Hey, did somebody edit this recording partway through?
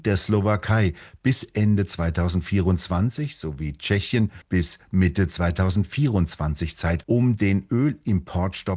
yes; 2 cuts; at 4.4 s, 7.0 s

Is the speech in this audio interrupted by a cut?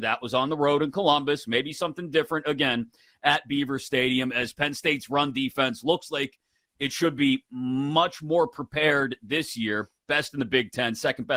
no; 0 cuts

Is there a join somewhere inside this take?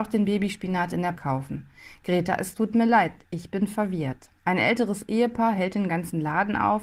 yes; 2 cuts; at 1.1 s, 4.4 s

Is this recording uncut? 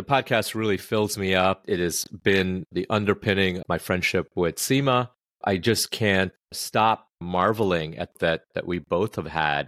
no; 2 cuts; at 3.6 s, 8.1 s

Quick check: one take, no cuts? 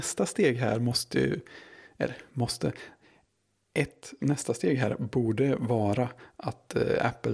no; 1 cut; at 4.2 s

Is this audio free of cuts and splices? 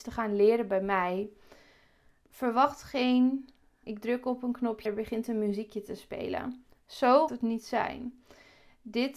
no; 3 cuts; at 3.8 s, 4.9 s, 7.3 s

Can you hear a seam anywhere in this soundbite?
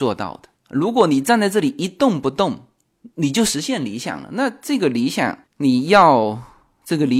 yes; 1 cut; at 5.5 s

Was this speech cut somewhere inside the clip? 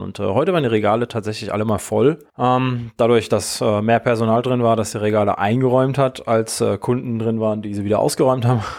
yes; 1 cut; at 2.3 s

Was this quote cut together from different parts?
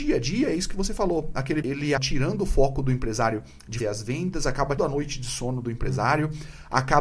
yes; 4 cuts; at 1.6 s, 2.0 s, 3.8 s, 4.8 s

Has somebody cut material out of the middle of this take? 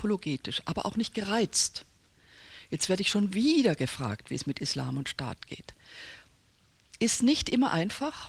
no; 0 cuts

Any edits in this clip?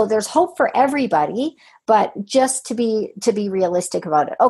no; 0 cuts

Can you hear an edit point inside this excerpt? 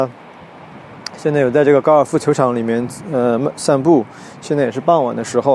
no; 0 cuts

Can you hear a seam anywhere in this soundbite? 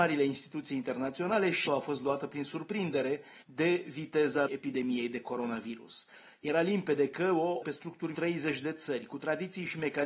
yes; 5 cuts; at 1.7 s, 3.4 s, 4.5 s, 7.6 s, 8.1 s

